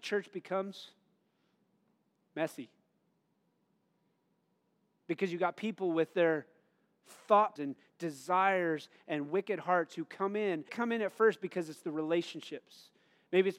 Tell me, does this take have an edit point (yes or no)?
yes